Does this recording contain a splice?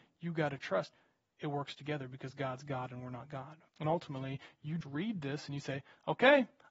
yes; 2 cuts; at 3.7 s, 4.8 s

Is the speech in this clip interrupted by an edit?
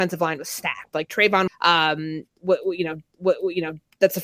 yes; 2 cuts; at 1.5 s, 3.1 s

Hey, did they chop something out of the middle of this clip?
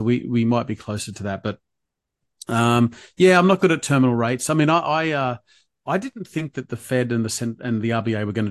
no; 0 cuts

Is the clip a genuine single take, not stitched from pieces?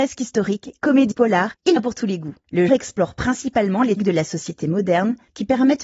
no; 4 cuts; at 1.1 s, 1.8 s, 2.7 s, 4.0 s

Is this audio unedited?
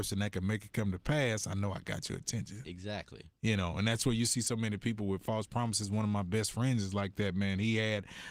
yes; 0 cuts

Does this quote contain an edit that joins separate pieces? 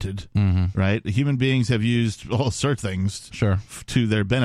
yes; 1 cut; at 2.8 s

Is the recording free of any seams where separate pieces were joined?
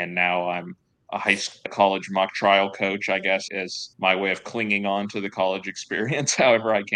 no; 3 cuts; at 1.7 s, 3.5 s, 3.9 s

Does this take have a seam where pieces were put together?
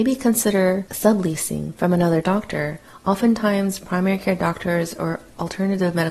no; 0 cuts

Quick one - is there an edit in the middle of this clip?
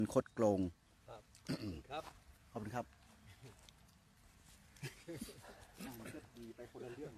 no; 0 cuts

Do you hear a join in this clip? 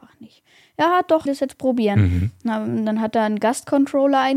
yes; 1 cut; at 1.3 s

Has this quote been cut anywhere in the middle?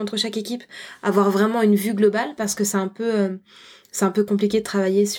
no; 0 cuts

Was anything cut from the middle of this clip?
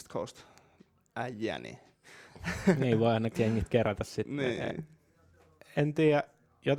yes; 1 cut; at 3.3 s

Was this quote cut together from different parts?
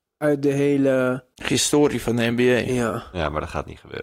yes; 1 cut; at 1.3 s

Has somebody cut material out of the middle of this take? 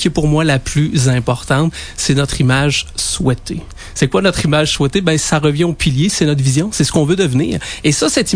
no; 0 cuts

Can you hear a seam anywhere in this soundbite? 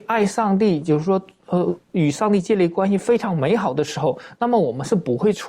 no; 0 cuts

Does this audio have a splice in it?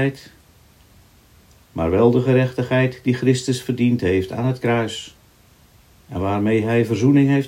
no; 0 cuts

